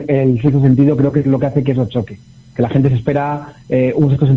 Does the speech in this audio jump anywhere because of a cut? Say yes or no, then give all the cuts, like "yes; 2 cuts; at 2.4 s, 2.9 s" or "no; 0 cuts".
no; 0 cuts